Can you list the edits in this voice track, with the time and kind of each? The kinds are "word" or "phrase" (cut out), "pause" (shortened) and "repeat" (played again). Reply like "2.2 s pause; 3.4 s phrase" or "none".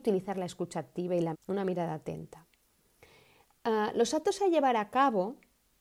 1.3 s word